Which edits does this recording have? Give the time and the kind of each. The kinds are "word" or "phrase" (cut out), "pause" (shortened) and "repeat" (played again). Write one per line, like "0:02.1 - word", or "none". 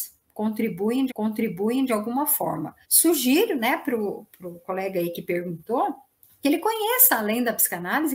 0:01.1 - repeat
0:02.8 - pause
0:06.2 - pause